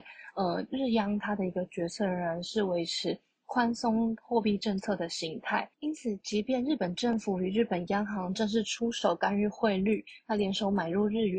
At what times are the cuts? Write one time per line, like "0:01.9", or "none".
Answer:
0:05.7